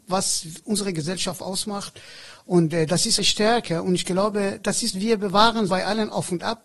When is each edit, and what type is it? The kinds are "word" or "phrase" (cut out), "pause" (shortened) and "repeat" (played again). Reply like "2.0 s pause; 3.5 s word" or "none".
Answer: 3.2 s word; 4.9 s phrase; 5.7 s word